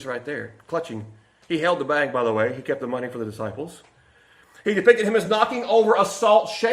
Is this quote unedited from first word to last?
yes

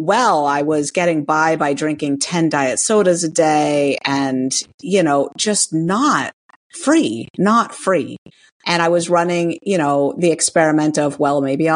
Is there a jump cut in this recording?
no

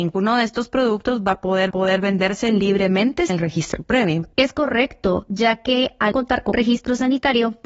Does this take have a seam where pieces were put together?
yes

